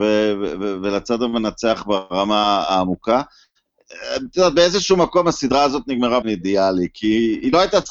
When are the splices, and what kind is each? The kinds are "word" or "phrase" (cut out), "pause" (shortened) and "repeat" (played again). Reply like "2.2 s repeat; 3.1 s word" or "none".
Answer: 6.2 s word

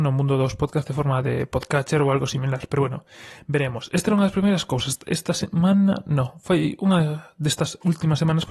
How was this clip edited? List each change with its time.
none

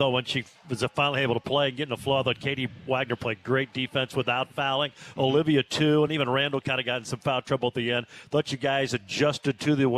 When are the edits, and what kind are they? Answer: none

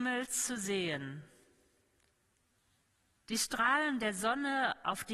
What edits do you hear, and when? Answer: none

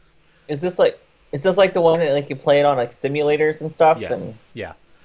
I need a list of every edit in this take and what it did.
none

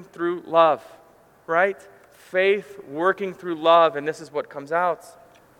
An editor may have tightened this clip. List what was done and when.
none

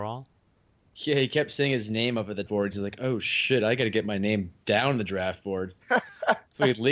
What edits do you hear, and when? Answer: 2.5 s phrase; 4.6 s pause

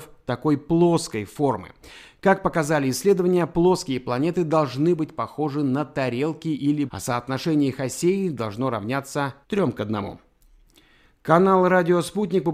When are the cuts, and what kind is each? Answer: 6.9 s word; 9.4 s pause

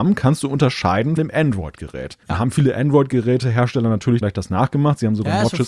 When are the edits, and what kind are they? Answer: 1.2 s word; 2.2 s pause; 4.2 s word

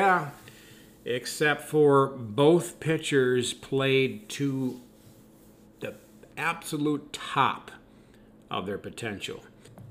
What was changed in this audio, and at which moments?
none

